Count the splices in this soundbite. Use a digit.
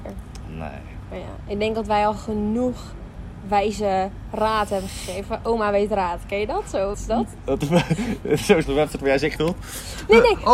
3